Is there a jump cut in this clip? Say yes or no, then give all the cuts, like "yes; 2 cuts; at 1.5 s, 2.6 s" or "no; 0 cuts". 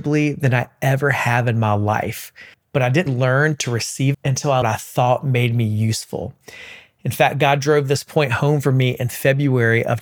yes; 4 cuts; at 2.5 s, 3.1 s, 4.1 s, 4.6 s